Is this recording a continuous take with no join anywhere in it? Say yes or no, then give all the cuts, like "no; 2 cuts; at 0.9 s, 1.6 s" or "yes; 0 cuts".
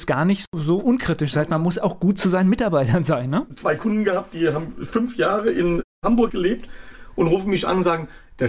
no; 1 cut; at 6.3 s